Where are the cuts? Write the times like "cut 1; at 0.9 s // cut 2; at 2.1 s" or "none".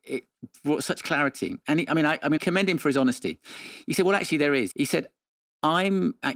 cut 1; at 2.4 s // cut 2; at 4.7 s